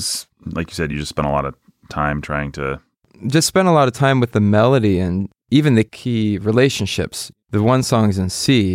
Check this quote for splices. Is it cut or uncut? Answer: uncut